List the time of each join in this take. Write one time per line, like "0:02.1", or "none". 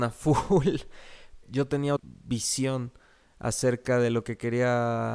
0:01.4
0:02.0

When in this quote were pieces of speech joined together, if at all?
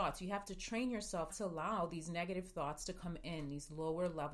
0:01.3

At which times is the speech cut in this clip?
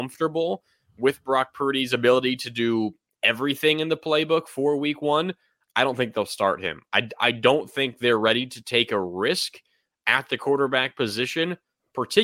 none

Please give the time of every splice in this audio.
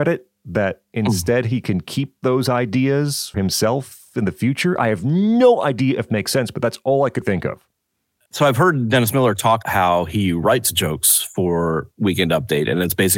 0:03.3
0:06.1
0:07.2
0:09.6

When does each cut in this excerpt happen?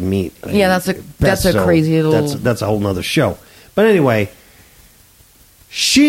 none

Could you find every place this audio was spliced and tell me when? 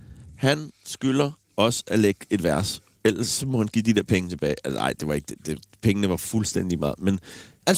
0:03.0

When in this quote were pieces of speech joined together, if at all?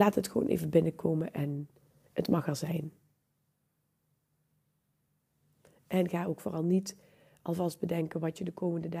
none

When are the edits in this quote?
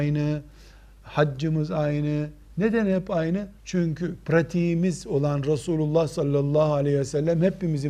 0:03.6

